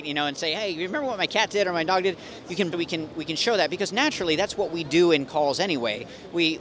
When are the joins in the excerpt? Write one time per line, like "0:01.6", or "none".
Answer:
0:02.7

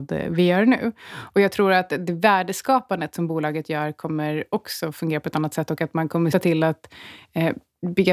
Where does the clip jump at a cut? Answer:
0:06.3

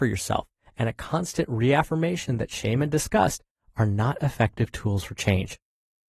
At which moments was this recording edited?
none

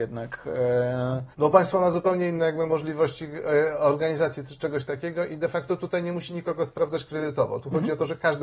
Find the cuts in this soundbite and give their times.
0:01.3

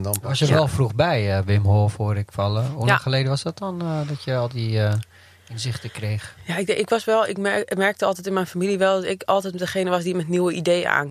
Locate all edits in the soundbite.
none

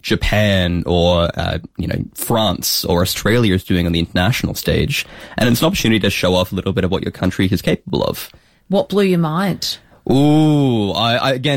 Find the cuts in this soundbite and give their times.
none

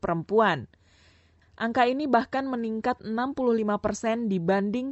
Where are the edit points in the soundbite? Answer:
none

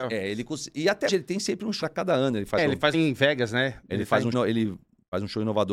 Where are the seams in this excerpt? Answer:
0:01.1
0:01.8
0:02.6
0:02.9
0:04.3

